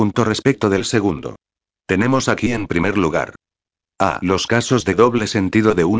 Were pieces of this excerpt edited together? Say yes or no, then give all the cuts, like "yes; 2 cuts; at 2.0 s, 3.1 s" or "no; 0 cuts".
no; 0 cuts